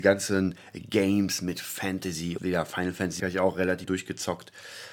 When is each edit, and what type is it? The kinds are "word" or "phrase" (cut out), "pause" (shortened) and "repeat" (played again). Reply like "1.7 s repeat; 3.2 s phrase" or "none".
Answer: 2.4 s word; 3.2 s word; 3.8 s word